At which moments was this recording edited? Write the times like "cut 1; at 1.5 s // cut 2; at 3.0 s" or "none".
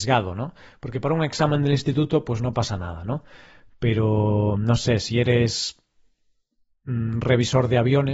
none